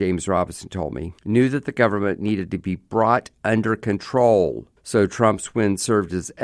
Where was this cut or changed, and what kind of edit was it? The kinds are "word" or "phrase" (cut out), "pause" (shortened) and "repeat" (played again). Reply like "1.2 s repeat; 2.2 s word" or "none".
1.2 s pause; 4.8 s pause